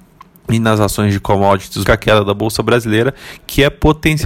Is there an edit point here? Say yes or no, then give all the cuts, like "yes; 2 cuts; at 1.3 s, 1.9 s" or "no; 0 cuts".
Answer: yes; 1 cut; at 1.9 s